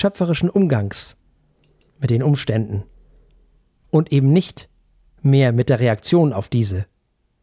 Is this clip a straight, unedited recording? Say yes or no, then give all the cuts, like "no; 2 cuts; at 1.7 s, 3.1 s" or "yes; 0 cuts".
yes; 0 cuts